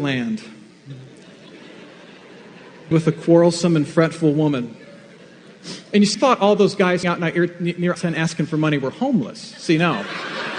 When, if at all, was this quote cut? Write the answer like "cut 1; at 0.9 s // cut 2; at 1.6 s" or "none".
cut 1; at 2.9 s // cut 2; at 6.1 s // cut 3; at 7.0 s // cut 4; at 7.9 s